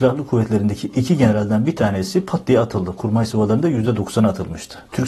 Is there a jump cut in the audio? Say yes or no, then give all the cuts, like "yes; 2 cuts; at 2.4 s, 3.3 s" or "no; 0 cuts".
no; 0 cuts